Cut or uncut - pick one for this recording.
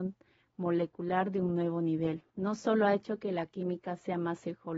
cut